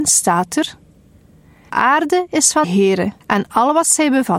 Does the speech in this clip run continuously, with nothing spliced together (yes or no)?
no